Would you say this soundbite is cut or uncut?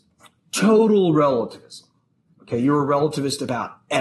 uncut